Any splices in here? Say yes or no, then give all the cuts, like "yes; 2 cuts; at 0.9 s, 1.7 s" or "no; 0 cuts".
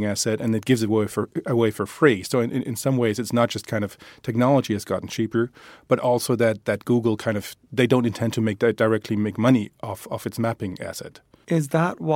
no; 0 cuts